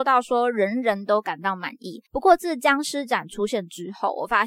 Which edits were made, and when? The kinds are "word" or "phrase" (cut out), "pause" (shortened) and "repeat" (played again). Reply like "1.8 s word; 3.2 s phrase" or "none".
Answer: 2.1 s pause